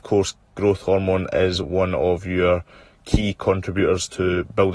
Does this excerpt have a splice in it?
no; 0 cuts

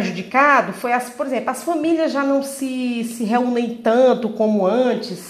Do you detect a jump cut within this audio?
no; 0 cuts

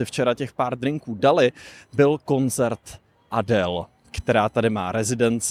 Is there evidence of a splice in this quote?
no; 0 cuts

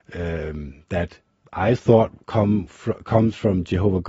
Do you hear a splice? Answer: no; 0 cuts

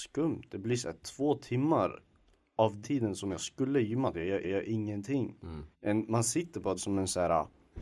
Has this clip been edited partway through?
yes; 4 cuts; at 2.8 s, 4.4 s, 5.7 s, 6.8 s

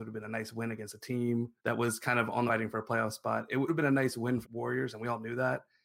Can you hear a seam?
yes; 4 cuts; at 1.6 s, 2.5 s, 3.7 s, 4.4 s

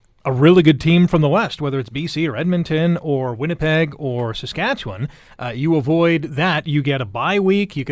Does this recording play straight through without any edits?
yes; 0 cuts

